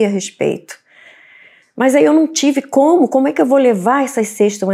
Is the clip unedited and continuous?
yes; 0 cuts

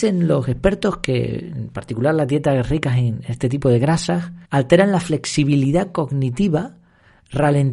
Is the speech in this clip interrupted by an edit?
yes; 1 cut; at 4.4 s

